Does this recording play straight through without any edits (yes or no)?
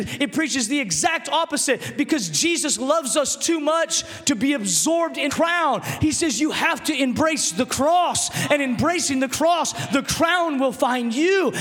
no